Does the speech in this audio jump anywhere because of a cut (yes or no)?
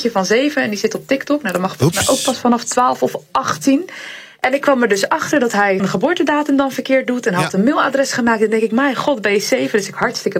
yes